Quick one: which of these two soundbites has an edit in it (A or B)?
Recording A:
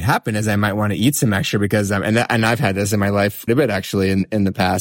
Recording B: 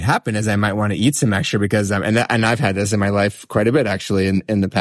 A